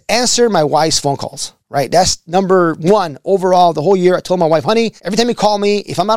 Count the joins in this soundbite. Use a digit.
2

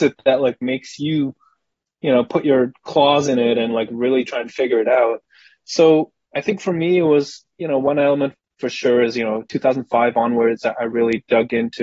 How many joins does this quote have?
0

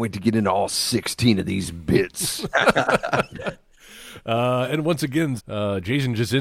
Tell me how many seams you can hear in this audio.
1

